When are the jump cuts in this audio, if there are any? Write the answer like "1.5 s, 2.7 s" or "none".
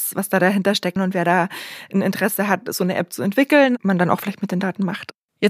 1.0 s, 3.8 s